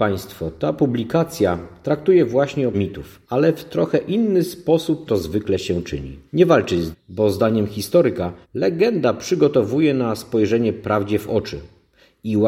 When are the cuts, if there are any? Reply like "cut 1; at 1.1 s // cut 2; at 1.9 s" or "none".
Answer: cut 1; at 2.7 s // cut 2; at 3.2 s // cut 3; at 5.1 s // cut 4; at 6.3 s // cut 5; at 6.9 s // cut 6; at 8.4 s